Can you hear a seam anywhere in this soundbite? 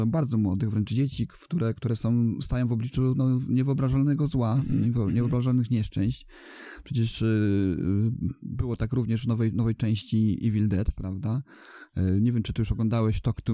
no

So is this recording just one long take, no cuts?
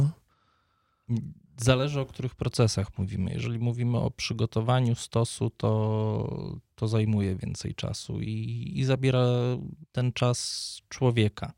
no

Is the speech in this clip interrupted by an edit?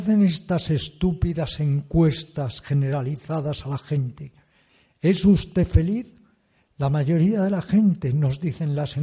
no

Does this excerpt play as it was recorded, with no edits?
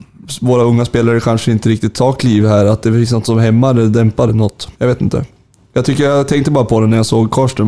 no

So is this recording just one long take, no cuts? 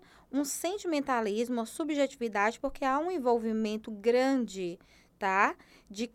yes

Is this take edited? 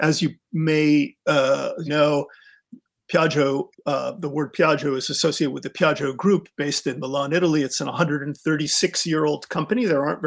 yes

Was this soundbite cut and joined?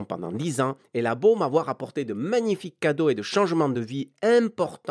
no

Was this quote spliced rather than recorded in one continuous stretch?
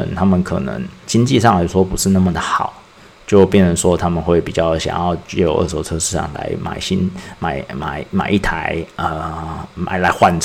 yes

